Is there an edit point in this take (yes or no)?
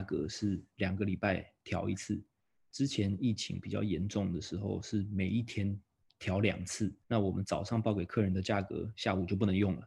yes